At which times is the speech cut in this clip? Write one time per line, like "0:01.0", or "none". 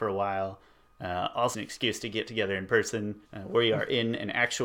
0:01.5
0:03.2